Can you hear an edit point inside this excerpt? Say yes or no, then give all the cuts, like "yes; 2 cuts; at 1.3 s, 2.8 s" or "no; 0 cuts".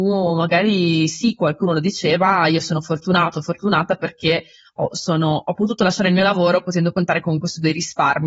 no; 0 cuts